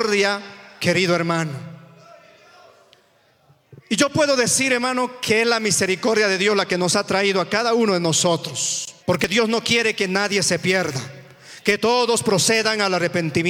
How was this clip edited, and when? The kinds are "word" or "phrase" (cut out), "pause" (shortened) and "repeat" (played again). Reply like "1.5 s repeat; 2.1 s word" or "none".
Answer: 3.8 s pause; 9.0 s pause

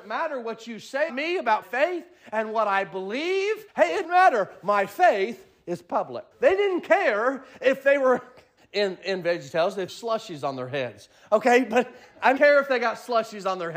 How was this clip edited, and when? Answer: 1.1 s word; 1.6 s word; 3.7 s pause; 4.0 s word; 6.3 s pause; 8.6 s word; 9.9 s word; 12.4 s phrase

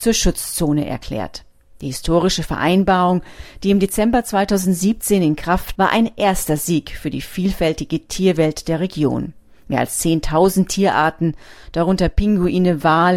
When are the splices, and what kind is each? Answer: 5.7 s word

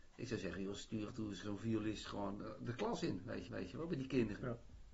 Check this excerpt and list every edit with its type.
1.1 s word; 1.4 s word; 3.5 s repeat

